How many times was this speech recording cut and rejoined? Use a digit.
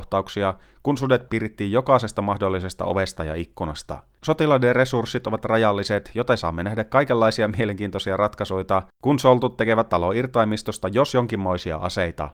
1